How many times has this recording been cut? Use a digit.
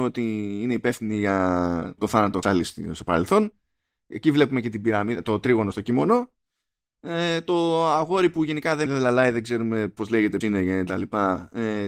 5